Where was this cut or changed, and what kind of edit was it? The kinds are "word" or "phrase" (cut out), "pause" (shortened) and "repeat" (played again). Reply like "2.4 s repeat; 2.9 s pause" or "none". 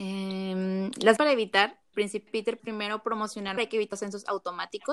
1.2 s word; 1.9 s word; 2.3 s word; 2.6 s word; 3.6 s word; 3.9 s word